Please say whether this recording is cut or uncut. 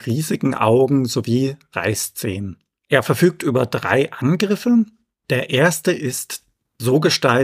uncut